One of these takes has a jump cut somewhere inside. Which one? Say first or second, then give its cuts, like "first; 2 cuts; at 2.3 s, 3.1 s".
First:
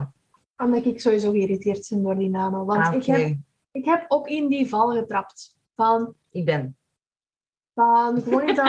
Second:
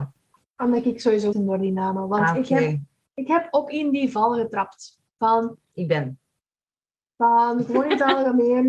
second; 1 cut; at 1.3 s